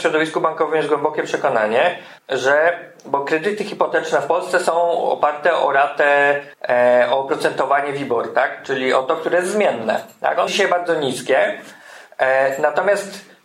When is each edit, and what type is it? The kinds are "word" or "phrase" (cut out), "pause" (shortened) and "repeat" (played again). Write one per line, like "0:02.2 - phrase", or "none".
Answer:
0:02.2 - pause
0:06.5 - pause
0:10.5 - word